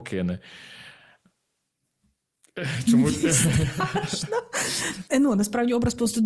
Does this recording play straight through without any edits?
yes; 0 cuts

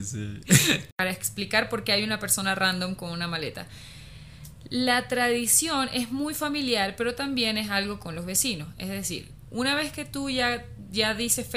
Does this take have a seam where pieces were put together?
no; 0 cuts

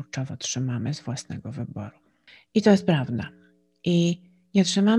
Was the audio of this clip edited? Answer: no; 0 cuts

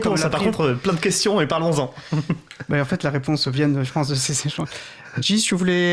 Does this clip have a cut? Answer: no; 0 cuts

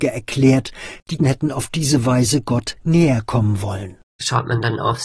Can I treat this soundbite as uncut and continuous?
no; 1 cut; at 1.2 s

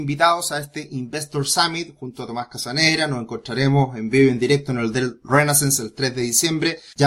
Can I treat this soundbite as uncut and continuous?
yes; 0 cuts

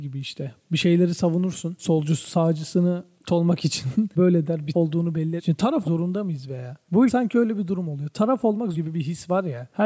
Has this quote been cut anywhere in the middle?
yes; 7 cuts; at 3.3 s, 4.2 s, 4.7 s, 5.4 s, 5.8 s, 7.1 s, 8.7 s

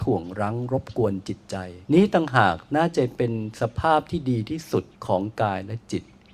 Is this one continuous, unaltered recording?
no; 2 cuts; at 1.8 s, 4.9 s

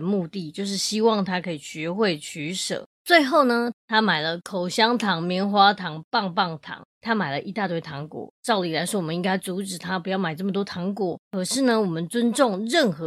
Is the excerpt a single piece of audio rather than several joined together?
no; 4 cuts; at 2.9 s, 3.8 s, 6.9 s, 11.2 s

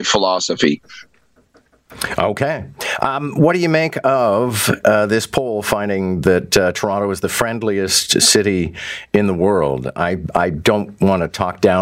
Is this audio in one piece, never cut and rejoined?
yes; 0 cuts

